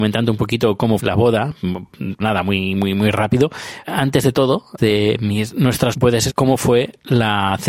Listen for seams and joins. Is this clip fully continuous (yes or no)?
no